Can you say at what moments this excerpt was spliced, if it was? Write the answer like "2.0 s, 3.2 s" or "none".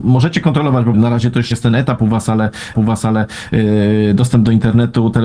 0.9 s, 1.5 s, 2.7 s